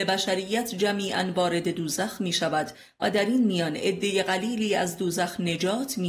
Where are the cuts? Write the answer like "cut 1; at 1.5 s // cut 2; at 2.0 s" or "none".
none